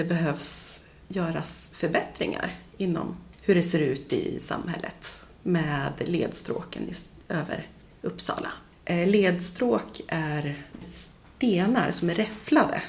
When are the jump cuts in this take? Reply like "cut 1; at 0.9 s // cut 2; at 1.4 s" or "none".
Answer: none